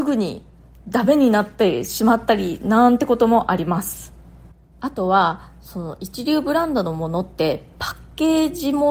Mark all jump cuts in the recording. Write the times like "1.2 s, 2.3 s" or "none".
none